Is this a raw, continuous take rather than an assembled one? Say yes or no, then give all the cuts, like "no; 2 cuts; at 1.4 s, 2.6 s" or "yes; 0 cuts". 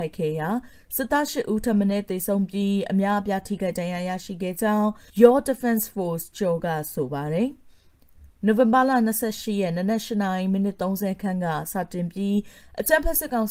no; 1 cut; at 5.1 s